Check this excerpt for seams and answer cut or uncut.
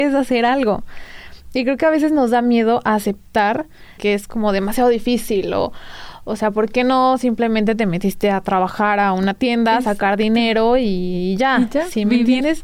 uncut